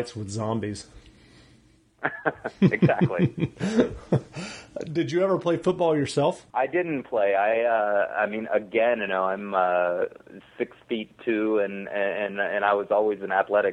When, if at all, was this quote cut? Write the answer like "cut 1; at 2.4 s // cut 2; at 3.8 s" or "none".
cut 1; at 6.5 s // cut 2; at 9.1 s

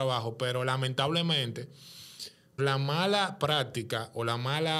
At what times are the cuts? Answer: cut 1; at 2.6 s

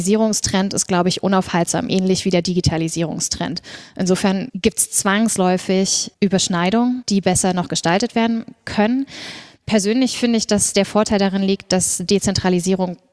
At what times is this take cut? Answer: none

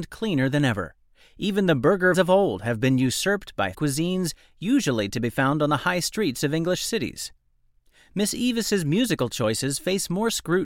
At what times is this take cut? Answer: cut 1; at 2.1 s // cut 2; at 3.7 s

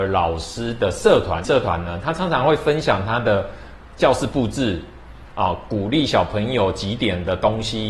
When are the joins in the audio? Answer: cut 1; at 1.4 s

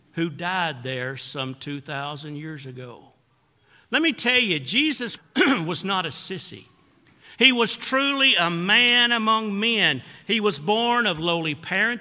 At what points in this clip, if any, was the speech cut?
cut 1; at 5.2 s

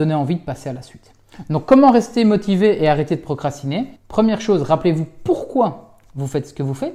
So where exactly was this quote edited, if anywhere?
cut 1; at 4.0 s

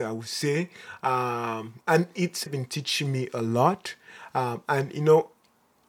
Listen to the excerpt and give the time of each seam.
cut 1; at 2.5 s

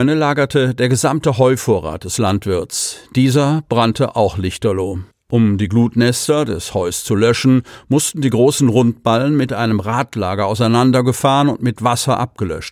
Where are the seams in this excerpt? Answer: none

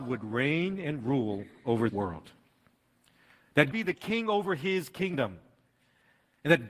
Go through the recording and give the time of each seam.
cut 1; at 1.9 s // cut 2; at 3.7 s

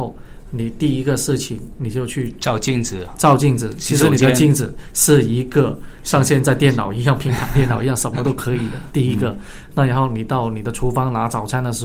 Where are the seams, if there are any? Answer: none

